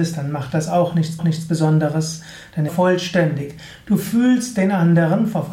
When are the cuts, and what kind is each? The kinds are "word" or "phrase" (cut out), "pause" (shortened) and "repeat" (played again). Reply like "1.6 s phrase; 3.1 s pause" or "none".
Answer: 1.2 s repeat; 2.7 s phrase